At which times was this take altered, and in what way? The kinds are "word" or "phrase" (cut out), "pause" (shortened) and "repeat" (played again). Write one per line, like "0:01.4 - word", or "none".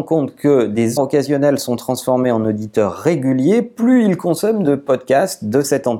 0:01.0 - word